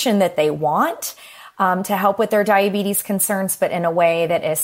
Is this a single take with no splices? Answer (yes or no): yes